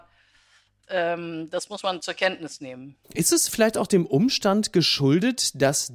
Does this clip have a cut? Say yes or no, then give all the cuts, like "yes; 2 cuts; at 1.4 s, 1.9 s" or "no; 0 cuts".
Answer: yes; 1 cut; at 3.0 s